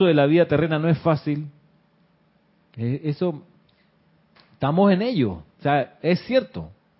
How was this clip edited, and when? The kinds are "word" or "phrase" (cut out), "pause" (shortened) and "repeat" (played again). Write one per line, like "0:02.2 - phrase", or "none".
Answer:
none